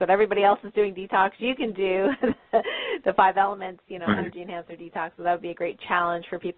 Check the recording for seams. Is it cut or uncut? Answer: uncut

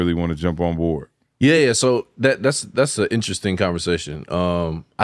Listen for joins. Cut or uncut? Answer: uncut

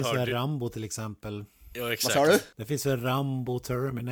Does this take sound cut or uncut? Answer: cut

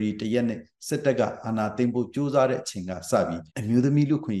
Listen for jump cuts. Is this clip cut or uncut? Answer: cut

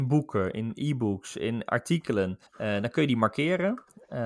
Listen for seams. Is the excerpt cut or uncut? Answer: cut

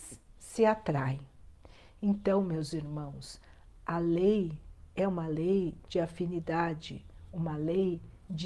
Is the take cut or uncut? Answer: uncut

